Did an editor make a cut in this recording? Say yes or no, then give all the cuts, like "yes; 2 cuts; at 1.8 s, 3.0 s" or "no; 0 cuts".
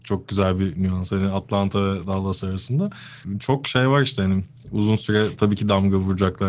no; 0 cuts